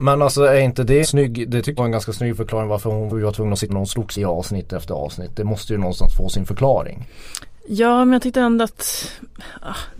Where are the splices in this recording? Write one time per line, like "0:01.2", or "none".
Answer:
0:01.0
0:01.8
0:03.1
0:03.7
0:04.1